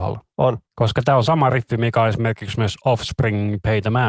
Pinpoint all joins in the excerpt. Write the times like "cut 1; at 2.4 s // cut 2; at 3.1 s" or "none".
none